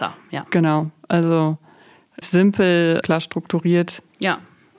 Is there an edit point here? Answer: yes; 2 cuts; at 2.2 s, 3.0 s

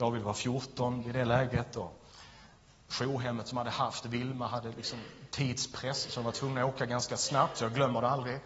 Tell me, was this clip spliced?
no; 0 cuts

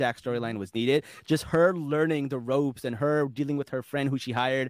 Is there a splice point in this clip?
no; 0 cuts

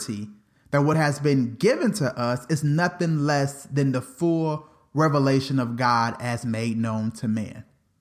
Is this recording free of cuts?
yes; 0 cuts

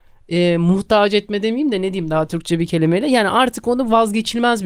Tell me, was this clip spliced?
no; 0 cuts

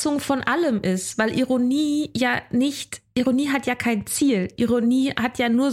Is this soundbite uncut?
yes; 0 cuts

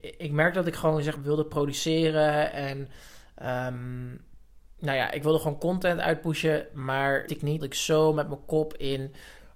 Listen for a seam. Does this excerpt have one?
yes; 3 cuts; at 1.2 s, 7.3 s, 7.6 s

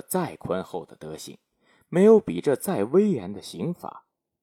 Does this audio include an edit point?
no; 0 cuts

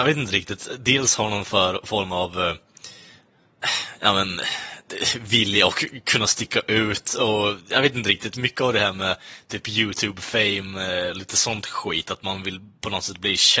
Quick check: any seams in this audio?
no; 0 cuts

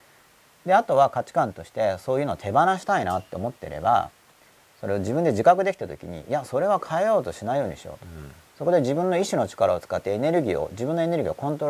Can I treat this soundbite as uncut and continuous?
yes; 0 cuts

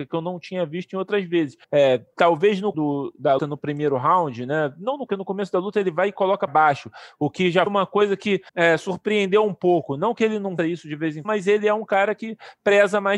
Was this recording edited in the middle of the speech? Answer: yes; 9 cuts; at 1.6 s, 2.7 s, 3.4 s, 5.1 s, 6.5 s, 7.7 s, 8.5 s, 10.6 s, 11.2 s

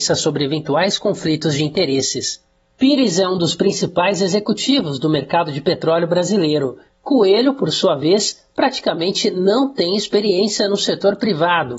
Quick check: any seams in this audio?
no; 0 cuts

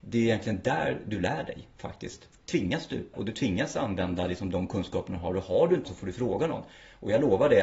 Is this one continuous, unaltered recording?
no; 3 cuts; at 2.3 s, 3.1 s, 5.8 s

